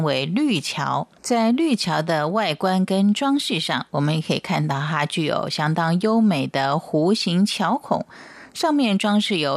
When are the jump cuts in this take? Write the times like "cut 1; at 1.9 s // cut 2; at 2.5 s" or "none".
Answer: cut 1; at 1.2 s